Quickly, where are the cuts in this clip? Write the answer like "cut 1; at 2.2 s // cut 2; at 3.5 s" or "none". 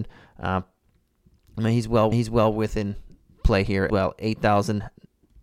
cut 1; at 2.1 s // cut 2; at 3.9 s